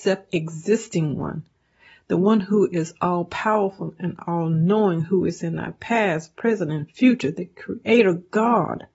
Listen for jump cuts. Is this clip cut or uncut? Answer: uncut